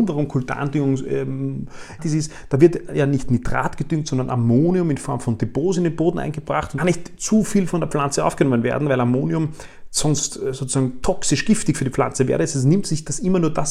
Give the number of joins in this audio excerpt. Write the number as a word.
two